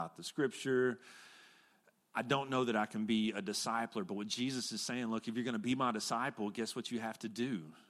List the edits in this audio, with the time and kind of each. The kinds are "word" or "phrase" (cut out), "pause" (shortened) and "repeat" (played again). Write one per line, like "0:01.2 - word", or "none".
none